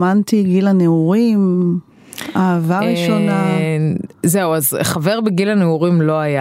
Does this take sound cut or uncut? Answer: uncut